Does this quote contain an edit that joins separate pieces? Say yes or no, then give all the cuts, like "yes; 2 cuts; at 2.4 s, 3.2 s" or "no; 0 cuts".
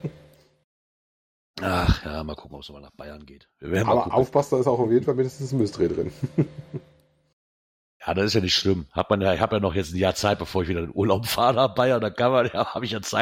no; 0 cuts